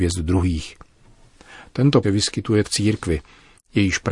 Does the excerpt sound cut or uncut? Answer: cut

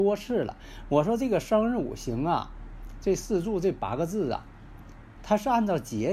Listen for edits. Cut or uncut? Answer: uncut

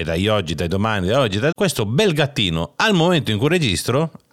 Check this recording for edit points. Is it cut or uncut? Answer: cut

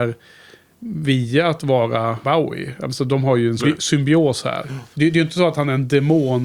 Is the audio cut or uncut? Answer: cut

